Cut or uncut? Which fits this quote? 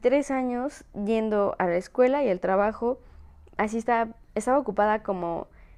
uncut